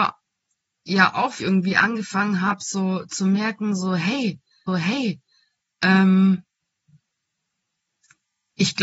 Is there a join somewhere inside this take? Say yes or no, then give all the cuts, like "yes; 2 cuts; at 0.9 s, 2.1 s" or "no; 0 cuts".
yes; 2 cuts; at 1.4 s, 4.7 s